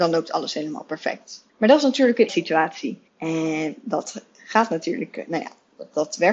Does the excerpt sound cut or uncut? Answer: cut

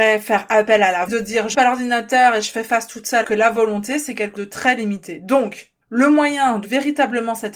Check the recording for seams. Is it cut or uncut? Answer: cut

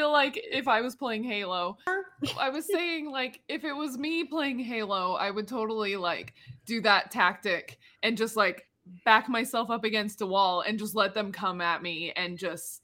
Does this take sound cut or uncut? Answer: uncut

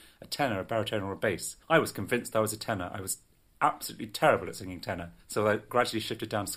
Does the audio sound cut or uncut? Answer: cut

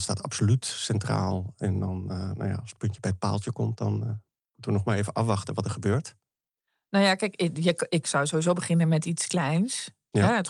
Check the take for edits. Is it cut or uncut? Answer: uncut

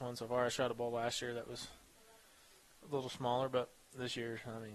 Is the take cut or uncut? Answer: uncut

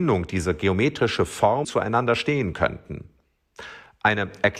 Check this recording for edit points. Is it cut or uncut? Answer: cut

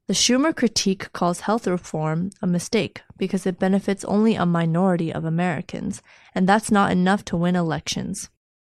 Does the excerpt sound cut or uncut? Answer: uncut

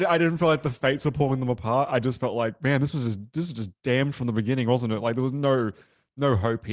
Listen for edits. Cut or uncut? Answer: uncut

